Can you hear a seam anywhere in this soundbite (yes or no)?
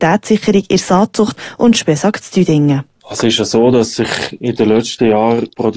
no